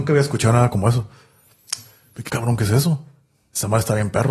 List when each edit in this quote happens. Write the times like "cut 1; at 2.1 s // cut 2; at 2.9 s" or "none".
cut 1; at 2.3 s